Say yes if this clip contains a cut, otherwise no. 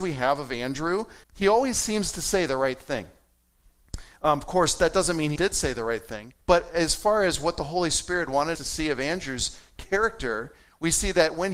yes